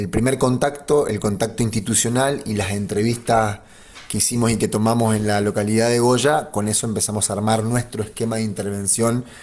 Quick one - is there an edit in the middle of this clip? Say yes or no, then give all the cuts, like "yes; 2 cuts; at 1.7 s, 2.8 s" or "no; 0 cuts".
no; 0 cuts